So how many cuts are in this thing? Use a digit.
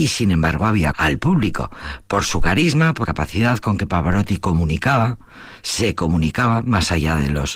2